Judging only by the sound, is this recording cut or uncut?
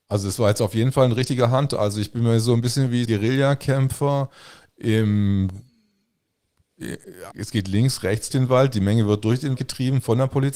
cut